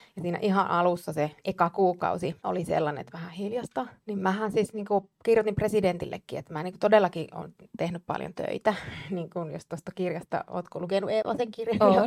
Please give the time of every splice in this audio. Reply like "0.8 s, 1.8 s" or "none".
2.4 s, 4.0 s